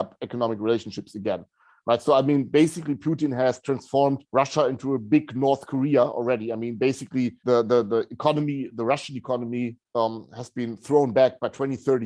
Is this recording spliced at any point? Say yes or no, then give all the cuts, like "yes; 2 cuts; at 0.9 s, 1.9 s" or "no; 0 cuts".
yes; 3 cuts; at 4.3 s, 7.4 s, 9.9 s